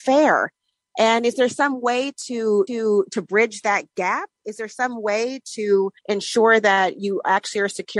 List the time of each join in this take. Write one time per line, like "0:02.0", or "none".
0:02.7
0:06.0